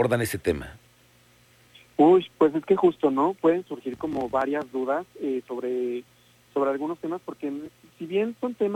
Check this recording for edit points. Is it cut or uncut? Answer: uncut